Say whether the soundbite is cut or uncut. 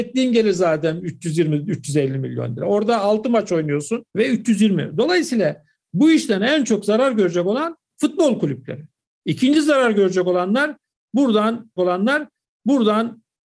cut